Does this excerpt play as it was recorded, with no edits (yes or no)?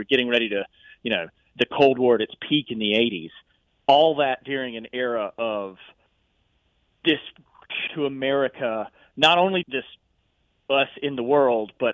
no